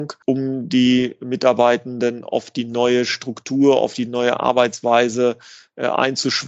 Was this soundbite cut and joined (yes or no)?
no